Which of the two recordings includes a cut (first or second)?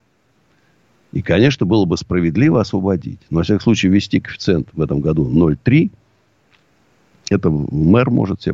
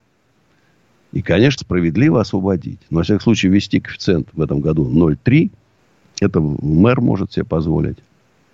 second